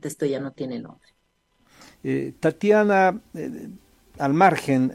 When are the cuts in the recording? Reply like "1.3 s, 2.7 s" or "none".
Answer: none